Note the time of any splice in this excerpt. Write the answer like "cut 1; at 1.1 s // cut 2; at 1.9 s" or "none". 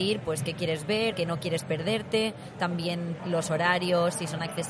cut 1; at 1.1 s // cut 2; at 3.2 s